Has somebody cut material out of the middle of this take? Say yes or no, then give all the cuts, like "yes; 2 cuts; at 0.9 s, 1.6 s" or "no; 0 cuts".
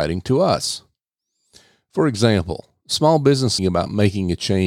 yes; 1 cut; at 3.6 s